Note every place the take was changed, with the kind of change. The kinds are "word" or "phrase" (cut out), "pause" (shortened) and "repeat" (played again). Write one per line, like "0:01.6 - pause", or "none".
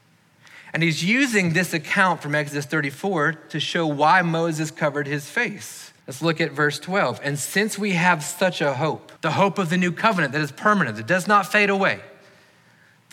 0:06.0 - pause
0:09.2 - pause